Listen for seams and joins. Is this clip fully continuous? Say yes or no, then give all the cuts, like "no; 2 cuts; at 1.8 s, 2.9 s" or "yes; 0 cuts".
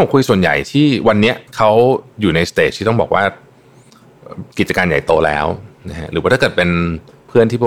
no; 2 cuts; at 1.5 s, 4.5 s